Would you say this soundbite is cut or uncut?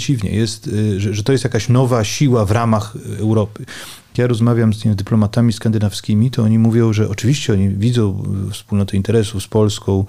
uncut